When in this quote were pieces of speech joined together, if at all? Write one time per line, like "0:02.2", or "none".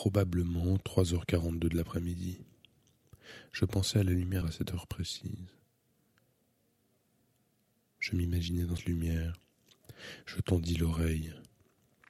0:04.4
0:08.8